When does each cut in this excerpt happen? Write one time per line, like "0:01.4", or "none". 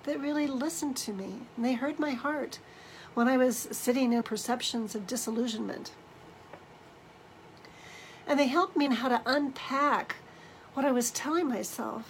0:04.2
0:08.9